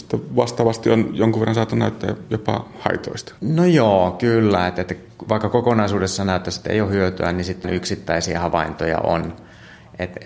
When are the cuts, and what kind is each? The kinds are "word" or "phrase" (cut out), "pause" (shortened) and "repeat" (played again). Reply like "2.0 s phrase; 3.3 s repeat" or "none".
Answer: 3.4 s pause; 7.6 s word